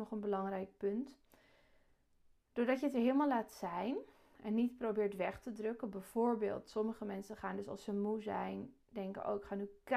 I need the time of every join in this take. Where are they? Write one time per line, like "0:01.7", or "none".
none